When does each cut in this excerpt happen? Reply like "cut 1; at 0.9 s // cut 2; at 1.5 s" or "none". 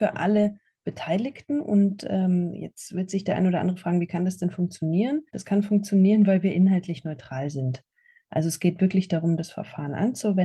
cut 1; at 5.3 s